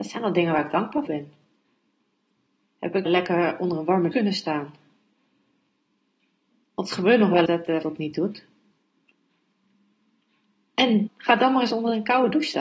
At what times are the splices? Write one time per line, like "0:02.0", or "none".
0:01.1
0:03.1
0:04.1
0:07.5
0:07.8
0:11.1